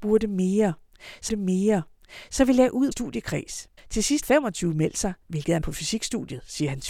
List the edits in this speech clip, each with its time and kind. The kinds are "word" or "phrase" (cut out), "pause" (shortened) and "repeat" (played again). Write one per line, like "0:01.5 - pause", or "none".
0:01.3 - repeat
0:02.9 - phrase
0:03.8 - pause
0:04.2 - word
0:05.2 - pause
0:05.6 - word